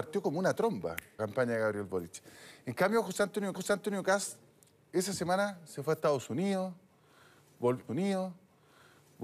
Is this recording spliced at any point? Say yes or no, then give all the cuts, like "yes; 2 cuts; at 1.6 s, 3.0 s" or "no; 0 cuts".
yes; 3 cuts; at 1.2 s, 3.5 s, 7.9 s